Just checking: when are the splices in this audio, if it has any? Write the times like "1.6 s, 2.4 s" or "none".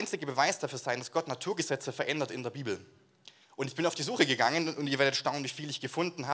none